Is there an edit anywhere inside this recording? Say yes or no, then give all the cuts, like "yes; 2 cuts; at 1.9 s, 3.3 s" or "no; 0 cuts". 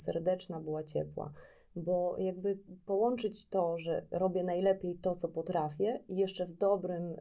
no; 0 cuts